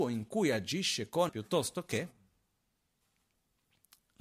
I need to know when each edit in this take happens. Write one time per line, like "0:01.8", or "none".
0:01.3